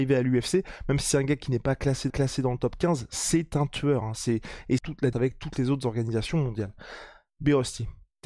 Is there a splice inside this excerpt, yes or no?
yes